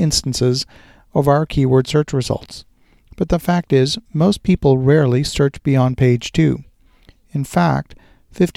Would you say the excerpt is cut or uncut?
uncut